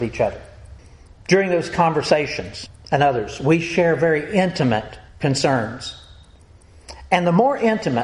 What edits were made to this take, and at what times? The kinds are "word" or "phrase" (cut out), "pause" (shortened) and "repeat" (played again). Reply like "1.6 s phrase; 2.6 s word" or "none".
none